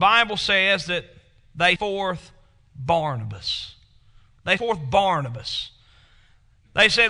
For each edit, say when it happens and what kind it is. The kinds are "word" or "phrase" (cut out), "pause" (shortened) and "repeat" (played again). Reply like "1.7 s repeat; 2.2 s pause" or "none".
1.8 s word; 4.6 s word